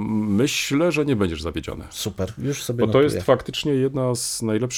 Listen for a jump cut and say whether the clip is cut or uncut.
uncut